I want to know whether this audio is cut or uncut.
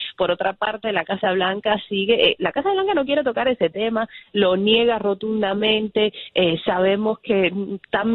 uncut